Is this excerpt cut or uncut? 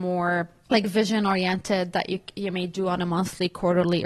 uncut